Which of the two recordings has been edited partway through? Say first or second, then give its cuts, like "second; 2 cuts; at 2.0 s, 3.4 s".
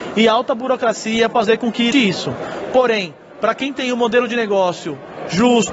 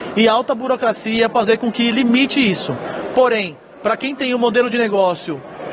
first; 1 cut; at 1.9 s